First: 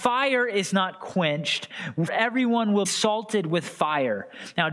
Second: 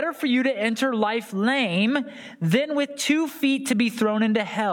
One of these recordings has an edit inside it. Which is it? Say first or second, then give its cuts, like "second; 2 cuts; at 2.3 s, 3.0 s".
first; 2 cuts; at 2.1 s, 2.8 s